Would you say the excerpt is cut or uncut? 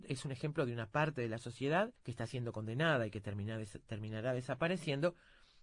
cut